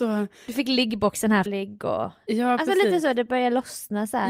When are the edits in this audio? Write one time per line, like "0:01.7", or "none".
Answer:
0:01.5